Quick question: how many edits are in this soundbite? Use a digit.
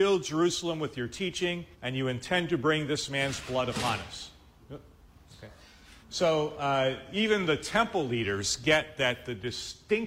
2